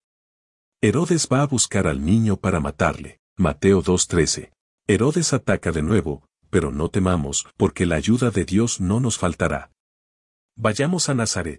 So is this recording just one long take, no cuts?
no; 3 cuts; at 3.3 s, 4.6 s, 7.5 s

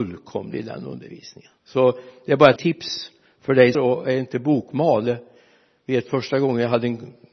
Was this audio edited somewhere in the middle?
yes; 3 cuts; at 1.6 s, 2.6 s, 3.7 s

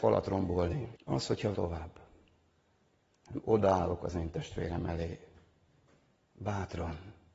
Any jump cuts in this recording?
yes; 2 cuts; at 1.0 s, 1.5 s

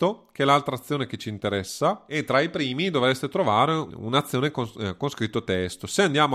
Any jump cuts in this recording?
no; 0 cuts

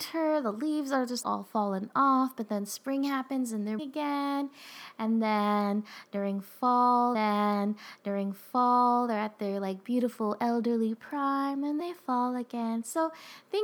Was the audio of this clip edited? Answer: yes; 4 cuts; at 1.2 s, 3.8 s, 7.1 s, 11.8 s

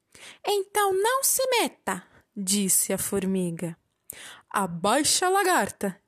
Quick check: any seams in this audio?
no; 0 cuts

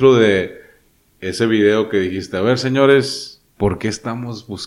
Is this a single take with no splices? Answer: no; 1 cut; at 3.5 s

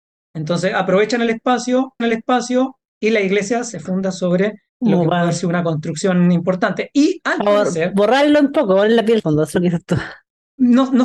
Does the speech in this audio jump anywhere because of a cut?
yes; 3 cuts; at 2.0 s, 4.7 s, 9.2 s

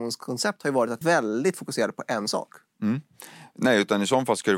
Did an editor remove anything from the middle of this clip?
yes; 1 cut; at 1.0 s

